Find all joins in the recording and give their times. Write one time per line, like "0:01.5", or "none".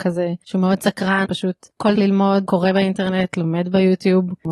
0:01.2
0:02.0
0:02.5